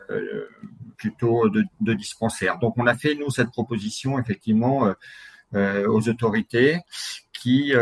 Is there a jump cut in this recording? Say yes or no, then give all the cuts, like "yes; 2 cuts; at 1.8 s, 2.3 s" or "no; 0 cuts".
yes; 1 cut; at 0.9 s